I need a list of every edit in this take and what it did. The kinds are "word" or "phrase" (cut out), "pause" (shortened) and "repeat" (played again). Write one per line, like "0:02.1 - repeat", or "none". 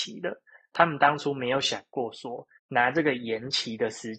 0:02.6 - pause